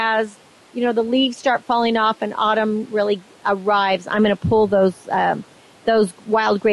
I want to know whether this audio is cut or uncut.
uncut